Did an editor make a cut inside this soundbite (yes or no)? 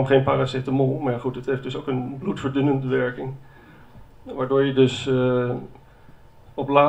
no